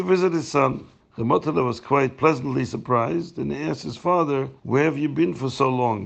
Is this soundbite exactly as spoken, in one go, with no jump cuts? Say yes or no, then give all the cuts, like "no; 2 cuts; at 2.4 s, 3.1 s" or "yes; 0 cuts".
no; 2 cuts; at 1.0 s, 4.6 s